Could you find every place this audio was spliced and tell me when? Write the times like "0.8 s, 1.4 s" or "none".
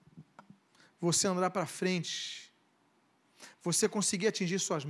none